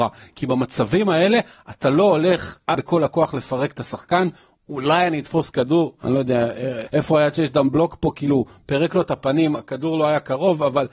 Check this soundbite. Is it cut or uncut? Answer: cut